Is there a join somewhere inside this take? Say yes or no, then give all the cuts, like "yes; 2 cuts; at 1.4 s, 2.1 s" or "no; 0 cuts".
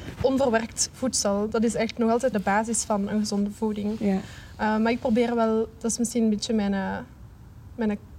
yes; 1 cut; at 2.3 s